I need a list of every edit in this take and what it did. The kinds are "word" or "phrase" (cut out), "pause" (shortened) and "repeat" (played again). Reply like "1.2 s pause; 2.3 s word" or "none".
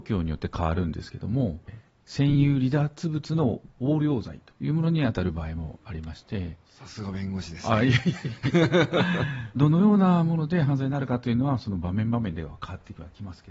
4.6 s pause; 9.6 s phrase